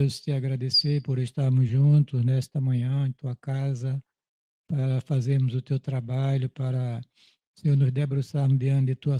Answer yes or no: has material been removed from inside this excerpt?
no